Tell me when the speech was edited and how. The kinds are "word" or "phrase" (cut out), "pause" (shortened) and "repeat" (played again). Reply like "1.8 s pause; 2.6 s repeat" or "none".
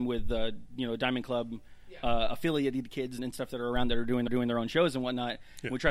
3.2 s word; 4.3 s repeat